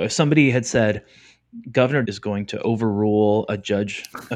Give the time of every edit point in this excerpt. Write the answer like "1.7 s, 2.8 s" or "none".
2.0 s